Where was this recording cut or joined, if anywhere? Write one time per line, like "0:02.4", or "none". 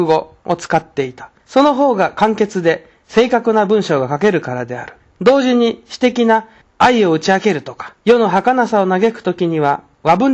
0:01.4
0:05.0
0:06.6
0:08.0